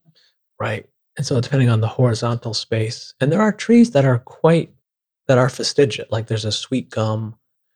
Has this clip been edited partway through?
no; 0 cuts

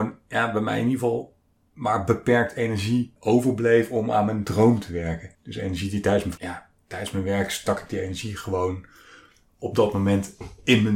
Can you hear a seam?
yes; 3 cuts; at 3.2 s, 5.3 s, 6.4 s

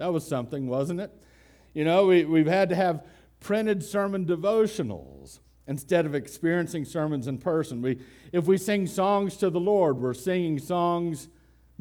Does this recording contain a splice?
no; 0 cuts

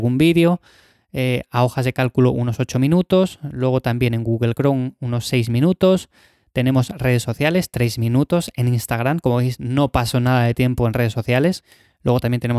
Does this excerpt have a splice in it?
no; 0 cuts

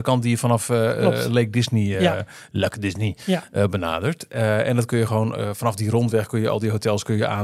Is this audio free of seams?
yes; 0 cuts

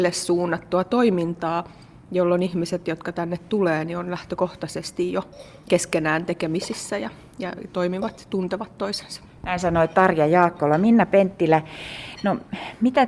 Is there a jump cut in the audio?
no; 0 cuts

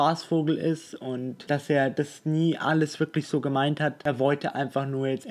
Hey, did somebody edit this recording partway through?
no; 0 cuts

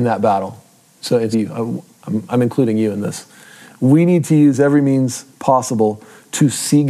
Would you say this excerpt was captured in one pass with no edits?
no; 2 cuts; at 1.3 s, 5.3 s

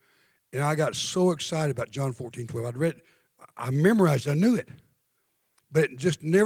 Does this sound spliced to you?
no; 0 cuts

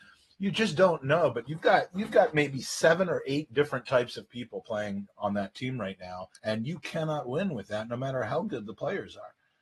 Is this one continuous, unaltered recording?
no; 1 cut; at 6.4 s

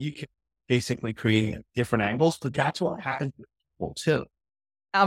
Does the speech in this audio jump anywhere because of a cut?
no; 0 cuts

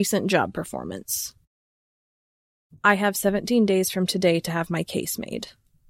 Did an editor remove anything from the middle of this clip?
no; 0 cuts

